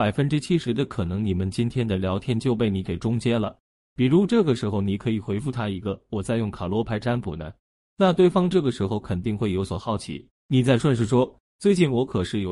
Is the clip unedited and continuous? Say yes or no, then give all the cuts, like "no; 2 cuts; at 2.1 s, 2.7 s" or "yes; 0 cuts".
yes; 0 cuts